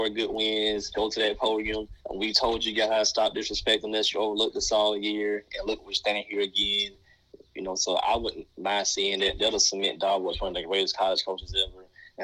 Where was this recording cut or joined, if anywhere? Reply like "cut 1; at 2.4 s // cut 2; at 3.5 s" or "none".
cut 1; at 2.0 s